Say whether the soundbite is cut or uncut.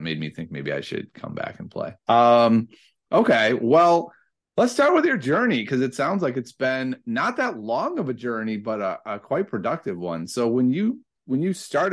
cut